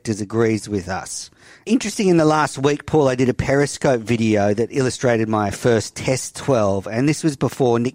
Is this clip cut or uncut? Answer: uncut